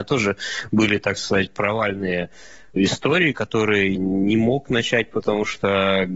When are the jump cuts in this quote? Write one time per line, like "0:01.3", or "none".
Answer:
0:02.8
0:04.0